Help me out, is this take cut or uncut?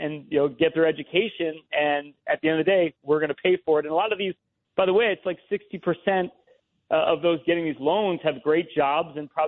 uncut